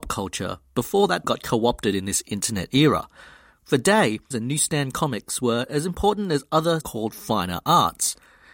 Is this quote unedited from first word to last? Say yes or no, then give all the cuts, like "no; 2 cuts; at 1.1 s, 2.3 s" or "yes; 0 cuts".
no; 3 cuts; at 1.2 s, 4.3 s, 6.8 s